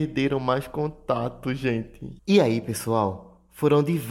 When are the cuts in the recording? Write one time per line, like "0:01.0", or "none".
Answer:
0:02.2